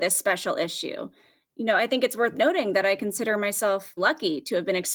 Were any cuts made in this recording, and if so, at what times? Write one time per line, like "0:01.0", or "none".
0:04.0